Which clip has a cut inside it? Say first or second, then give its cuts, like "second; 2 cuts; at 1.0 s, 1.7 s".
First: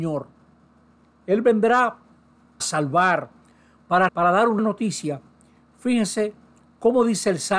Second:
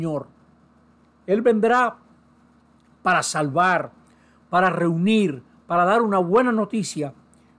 first; 3 cuts; at 2.6 s, 4.1 s, 4.6 s